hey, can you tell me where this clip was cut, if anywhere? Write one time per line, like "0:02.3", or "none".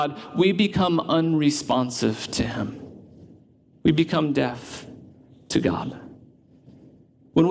none